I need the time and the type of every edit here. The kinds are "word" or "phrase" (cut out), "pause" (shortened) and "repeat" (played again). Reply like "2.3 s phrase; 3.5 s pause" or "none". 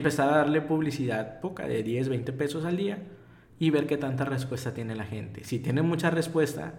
none